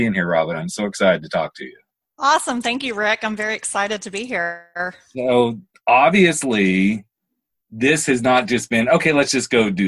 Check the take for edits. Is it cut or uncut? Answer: uncut